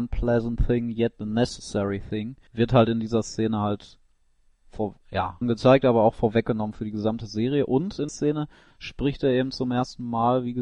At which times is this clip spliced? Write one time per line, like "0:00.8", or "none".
0:02.5
0:05.4
0:08.1